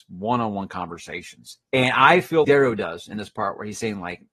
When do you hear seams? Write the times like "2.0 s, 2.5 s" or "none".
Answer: 1.6 s, 2.4 s

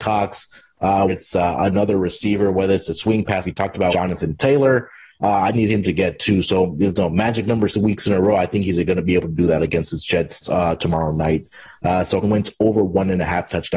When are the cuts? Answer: 1.1 s, 3.4 s, 3.9 s, 5.5 s, 7.7 s, 10.4 s, 12.2 s

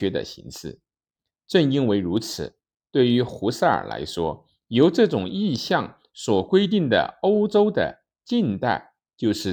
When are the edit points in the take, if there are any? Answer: none

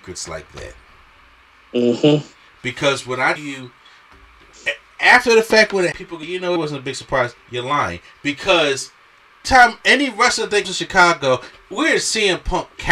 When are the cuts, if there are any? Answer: 3.4 s, 5.9 s, 6.2 s, 6.6 s, 9.4 s, 10.6 s

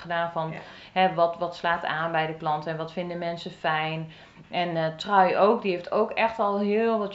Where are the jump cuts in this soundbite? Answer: none

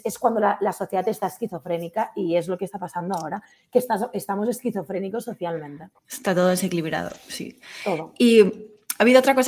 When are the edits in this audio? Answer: 6.0 s

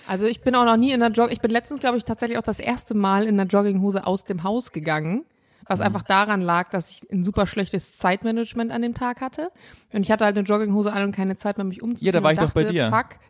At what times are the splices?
none

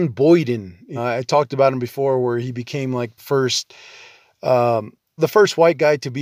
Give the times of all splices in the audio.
1.0 s, 3.2 s, 5.2 s

